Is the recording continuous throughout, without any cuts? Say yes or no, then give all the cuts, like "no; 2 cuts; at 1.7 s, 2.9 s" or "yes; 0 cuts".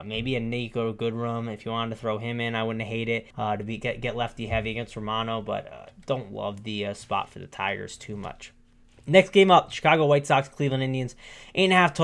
no; 2 cuts; at 3.3 s, 8.8 s